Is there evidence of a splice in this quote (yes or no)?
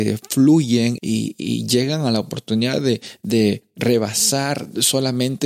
yes